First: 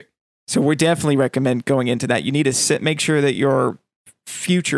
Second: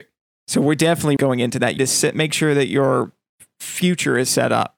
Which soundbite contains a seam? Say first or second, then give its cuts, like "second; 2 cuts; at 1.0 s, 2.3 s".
second; 2 cuts; at 1.2 s, 1.8 s